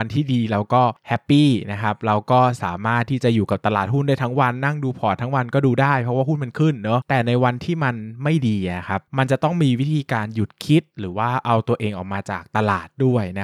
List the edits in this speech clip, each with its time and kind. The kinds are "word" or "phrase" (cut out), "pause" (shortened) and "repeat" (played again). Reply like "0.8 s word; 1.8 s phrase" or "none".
9.1 s pause